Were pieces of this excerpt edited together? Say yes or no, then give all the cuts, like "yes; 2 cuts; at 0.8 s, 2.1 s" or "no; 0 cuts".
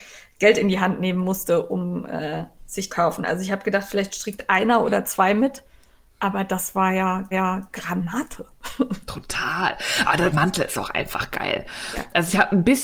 yes; 3 cuts; at 2.9 s, 7.3 s, 10.3 s